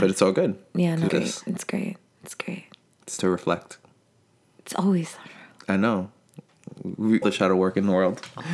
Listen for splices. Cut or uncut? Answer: cut